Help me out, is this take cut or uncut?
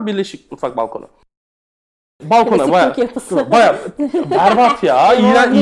uncut